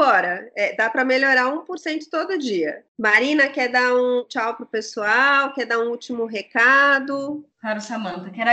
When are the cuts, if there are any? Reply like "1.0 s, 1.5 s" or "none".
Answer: none